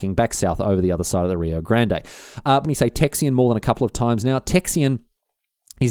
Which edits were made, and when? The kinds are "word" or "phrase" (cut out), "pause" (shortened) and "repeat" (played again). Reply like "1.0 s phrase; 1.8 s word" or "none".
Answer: 2.6 s phrase